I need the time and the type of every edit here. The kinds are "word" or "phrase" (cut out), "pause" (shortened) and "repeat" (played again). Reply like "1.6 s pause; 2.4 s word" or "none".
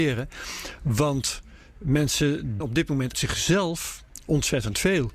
2.6 s word; 3.1 s word